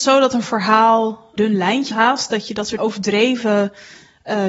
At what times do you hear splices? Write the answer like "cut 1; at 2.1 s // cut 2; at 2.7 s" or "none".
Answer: cut 1; at 1.4 s // cut 2; at 1.9 s // cut 3; at 2.8 s